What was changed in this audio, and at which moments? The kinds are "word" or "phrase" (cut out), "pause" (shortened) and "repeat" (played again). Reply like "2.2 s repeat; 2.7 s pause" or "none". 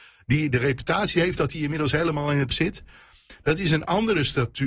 2.5 s word